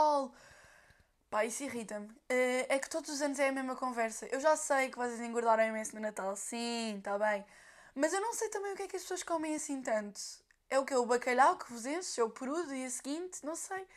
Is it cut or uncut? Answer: uncut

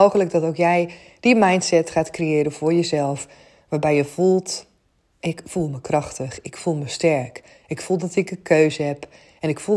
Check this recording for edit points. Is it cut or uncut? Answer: uncut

